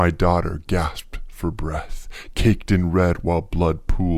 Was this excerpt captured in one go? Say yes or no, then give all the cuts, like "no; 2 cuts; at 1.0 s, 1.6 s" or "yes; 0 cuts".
yes; 0 cuts